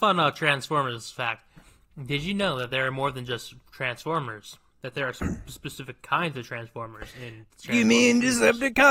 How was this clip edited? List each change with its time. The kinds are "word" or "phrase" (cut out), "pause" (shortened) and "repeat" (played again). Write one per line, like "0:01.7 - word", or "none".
none